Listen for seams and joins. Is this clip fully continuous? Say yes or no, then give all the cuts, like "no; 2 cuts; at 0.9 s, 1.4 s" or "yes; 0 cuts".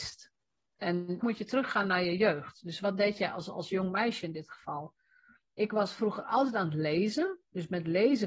no; 1 cut; at 1.2 s